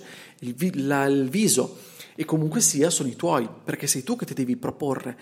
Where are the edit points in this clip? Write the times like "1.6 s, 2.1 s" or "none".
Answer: none